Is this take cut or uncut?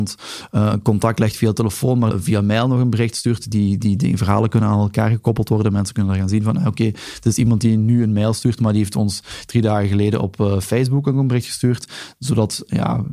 cut